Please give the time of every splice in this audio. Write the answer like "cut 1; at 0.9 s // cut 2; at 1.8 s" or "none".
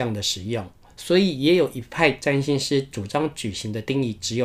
none